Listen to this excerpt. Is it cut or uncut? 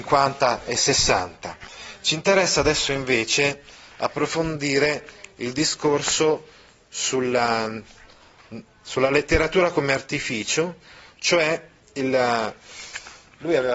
uncut